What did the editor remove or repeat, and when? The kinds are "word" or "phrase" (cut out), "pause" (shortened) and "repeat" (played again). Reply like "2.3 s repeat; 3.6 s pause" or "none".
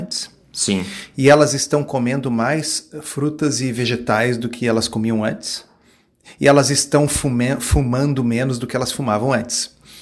none